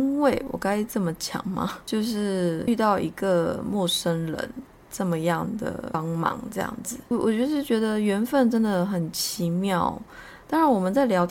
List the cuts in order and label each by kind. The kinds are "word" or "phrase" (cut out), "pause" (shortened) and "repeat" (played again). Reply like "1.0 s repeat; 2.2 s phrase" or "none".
none